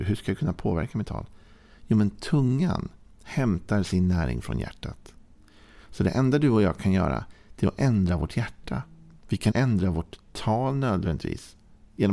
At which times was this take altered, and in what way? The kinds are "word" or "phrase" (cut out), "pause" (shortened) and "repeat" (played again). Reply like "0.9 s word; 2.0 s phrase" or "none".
9.5 s word

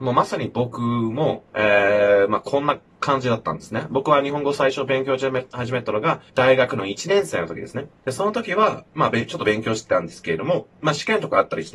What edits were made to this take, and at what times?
1.5 s pause; 6.3 s pause; 8.0 s pause; 10.7 s pause

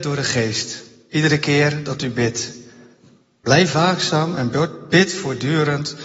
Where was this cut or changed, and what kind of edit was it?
none

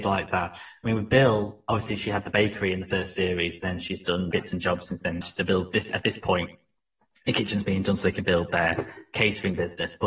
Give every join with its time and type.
4.3 s word; 5.2 s word

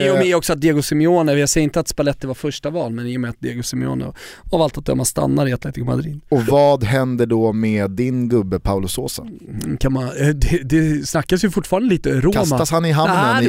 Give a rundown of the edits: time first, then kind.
none

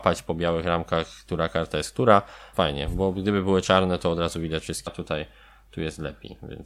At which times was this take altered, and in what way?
2.5 s word; 4.9 s word

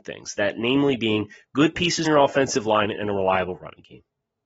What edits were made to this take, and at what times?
2.0 s word

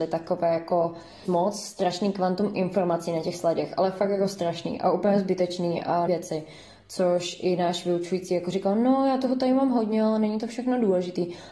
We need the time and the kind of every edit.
1.3 s word; 6.1 s word

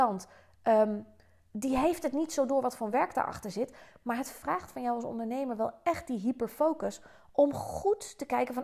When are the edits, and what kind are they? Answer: none

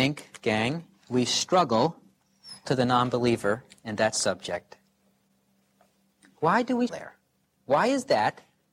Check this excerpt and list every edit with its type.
2.6 s word; 6.9 s word

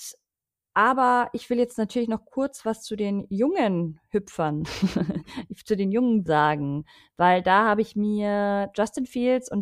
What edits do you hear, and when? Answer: 6.3 s word

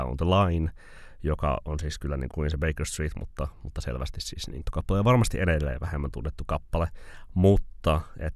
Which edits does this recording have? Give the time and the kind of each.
2.3 s phrase; 4.6 s phrase

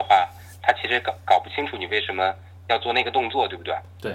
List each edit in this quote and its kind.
none

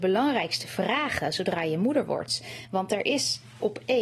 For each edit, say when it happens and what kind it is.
none

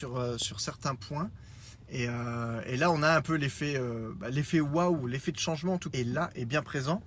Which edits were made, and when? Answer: 5.9 s word

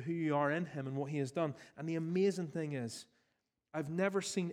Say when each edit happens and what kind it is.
none

